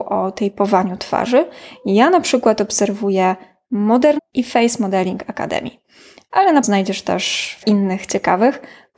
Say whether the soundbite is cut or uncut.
cut